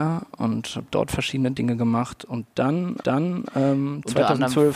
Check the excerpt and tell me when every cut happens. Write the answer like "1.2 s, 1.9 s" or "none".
3.0 s